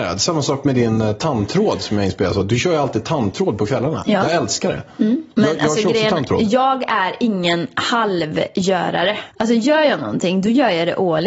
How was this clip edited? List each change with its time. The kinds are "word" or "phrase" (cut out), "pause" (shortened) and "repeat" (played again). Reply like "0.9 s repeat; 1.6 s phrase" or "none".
5.3 s pause; 9.3 s pause